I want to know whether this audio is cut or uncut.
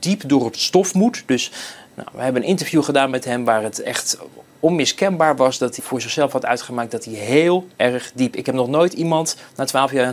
cut